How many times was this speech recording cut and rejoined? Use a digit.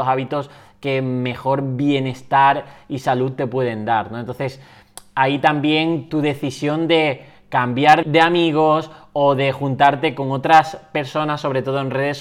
2